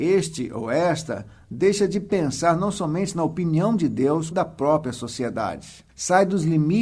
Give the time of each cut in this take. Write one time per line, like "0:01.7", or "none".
0:04.3
0:05.9